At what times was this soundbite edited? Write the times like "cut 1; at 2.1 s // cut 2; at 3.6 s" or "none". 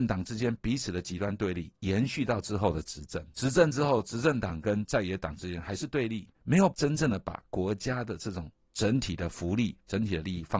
cut 1; at 3.3 s // cut 2; at 6.3 s